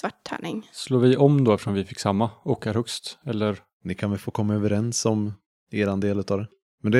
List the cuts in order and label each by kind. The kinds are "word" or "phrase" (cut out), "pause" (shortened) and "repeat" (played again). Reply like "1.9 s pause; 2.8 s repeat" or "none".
none

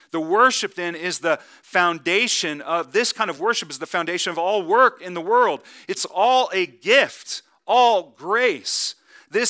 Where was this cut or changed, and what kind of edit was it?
none

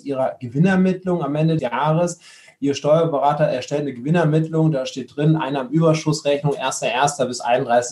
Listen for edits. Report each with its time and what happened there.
1.6 s word

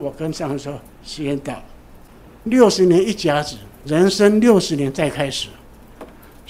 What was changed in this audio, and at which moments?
0.9 s pause

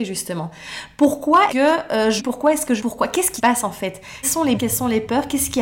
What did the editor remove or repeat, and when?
1.5 s word; 2.2 s word; 2.8 s word; 3.4 s word; 4.2 s word; 4.5 s word

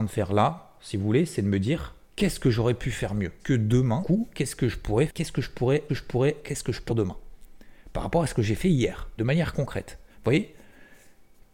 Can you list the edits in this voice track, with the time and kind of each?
2.0 s pause; 3.4 s word; 4.0 s word; 5.1 s word; 5.9 s repeat; 6.9 s phrase; 9.2 s word; 10.1 s pause

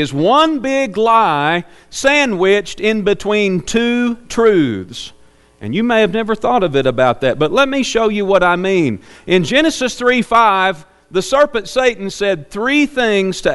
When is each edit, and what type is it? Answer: none

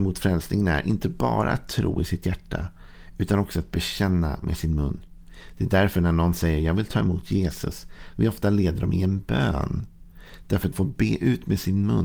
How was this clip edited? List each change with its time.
10.7 s word

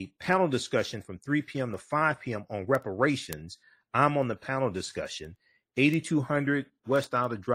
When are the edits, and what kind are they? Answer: none

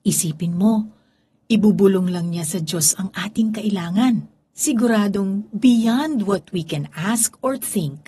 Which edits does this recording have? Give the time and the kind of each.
2.9 s word; 4.4 s pause

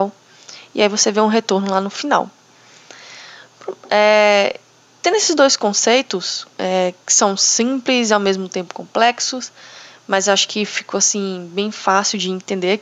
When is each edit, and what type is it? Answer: 6.5 s pause

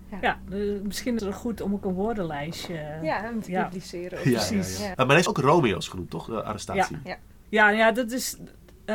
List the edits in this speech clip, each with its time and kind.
1.2 s word; 3.4 s word; 4.9 s word; 5.3 s word

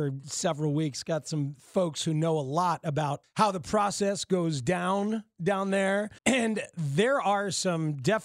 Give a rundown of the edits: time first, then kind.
3.2 s pause; 6.2 s pause

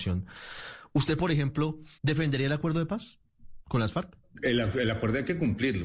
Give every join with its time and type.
2.0 s pause

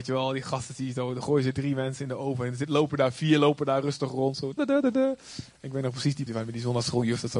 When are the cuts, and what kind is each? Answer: 4.6 s word; 6.3 s word

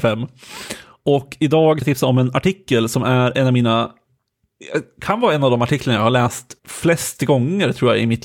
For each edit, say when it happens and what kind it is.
1.8 s word; 6.6 s pause

